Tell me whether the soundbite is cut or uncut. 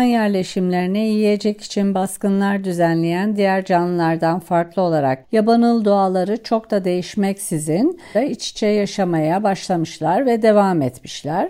cut